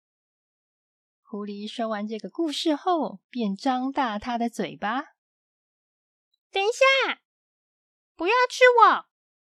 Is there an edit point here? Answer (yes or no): no